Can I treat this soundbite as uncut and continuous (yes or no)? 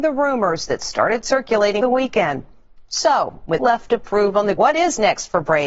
no